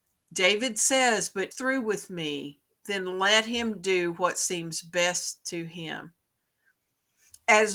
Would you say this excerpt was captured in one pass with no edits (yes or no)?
no